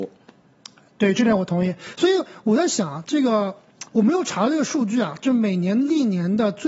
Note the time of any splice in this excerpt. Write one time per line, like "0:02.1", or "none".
0:03.9